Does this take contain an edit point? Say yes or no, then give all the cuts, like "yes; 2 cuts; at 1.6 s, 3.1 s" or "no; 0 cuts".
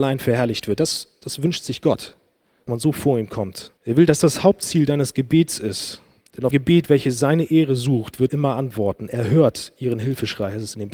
yes; 6 cuts; at 2.7 s, 3.8 s, 4.2 s, 6.2 s, 6.5 s, 8.3 s